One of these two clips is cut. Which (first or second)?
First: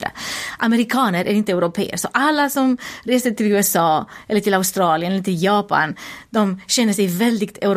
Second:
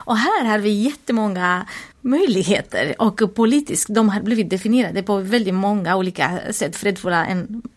second